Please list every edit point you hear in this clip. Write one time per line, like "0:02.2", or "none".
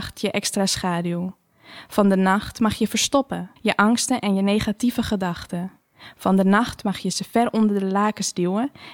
0:03.6